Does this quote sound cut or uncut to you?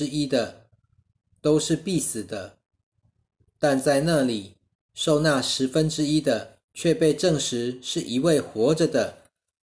cut